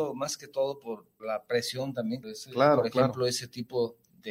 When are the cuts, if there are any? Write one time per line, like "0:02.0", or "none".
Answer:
0:01.2
0:02.2